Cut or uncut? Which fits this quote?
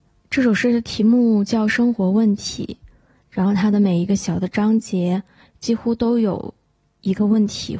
uncut